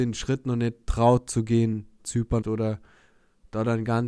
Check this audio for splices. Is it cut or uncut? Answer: cut